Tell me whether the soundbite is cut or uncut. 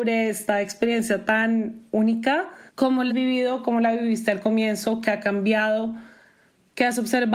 cut